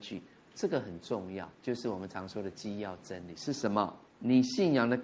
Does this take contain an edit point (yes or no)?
yes